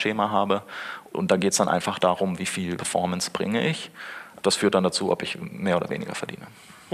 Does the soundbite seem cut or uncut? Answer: uncut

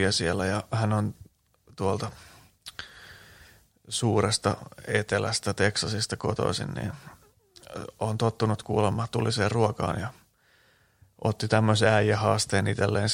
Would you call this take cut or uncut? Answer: uncut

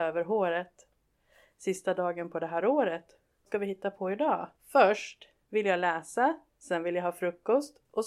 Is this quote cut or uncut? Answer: cut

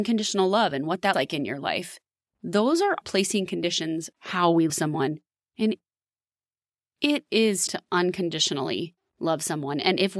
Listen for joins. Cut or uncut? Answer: cut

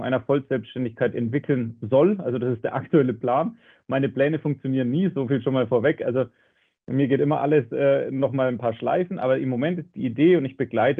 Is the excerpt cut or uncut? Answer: uncut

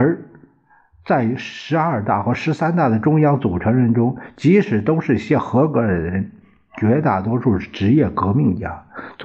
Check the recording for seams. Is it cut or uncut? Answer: uncut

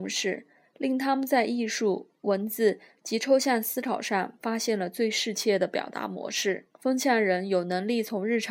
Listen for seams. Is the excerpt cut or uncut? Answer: cut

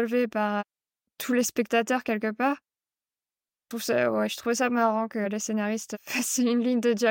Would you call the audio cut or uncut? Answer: cut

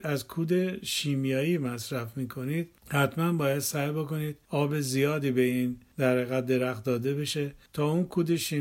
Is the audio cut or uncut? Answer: uncut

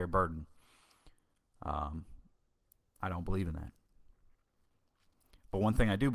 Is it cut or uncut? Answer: uncut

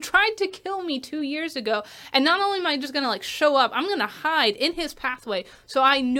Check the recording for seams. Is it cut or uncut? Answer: uncut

